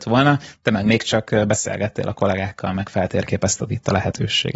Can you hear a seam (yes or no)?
no